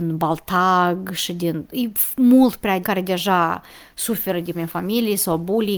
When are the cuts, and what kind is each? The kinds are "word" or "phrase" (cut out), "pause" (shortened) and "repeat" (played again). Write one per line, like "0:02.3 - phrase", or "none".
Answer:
0:02.8 - phrase
0:04.5 - word